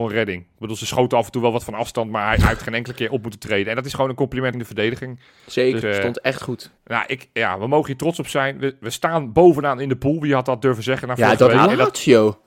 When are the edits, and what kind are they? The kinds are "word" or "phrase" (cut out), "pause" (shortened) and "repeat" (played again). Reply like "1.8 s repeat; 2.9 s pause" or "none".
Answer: 4.5 s word; 5.8 s word; 6.8 s pause